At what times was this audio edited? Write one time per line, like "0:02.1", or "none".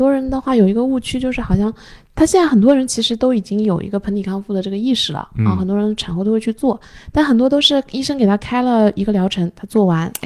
none